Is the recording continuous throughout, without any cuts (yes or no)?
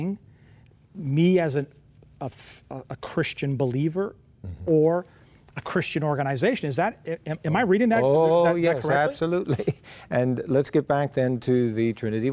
yes